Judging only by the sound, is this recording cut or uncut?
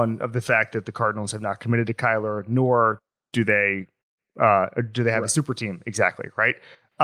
uncut